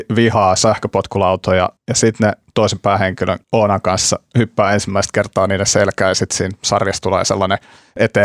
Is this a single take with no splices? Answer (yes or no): no